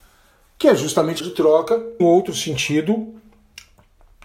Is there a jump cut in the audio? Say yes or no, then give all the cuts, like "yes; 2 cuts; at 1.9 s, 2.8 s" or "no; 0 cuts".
yes; 2 cuts; at 1.2 s, 2.0 s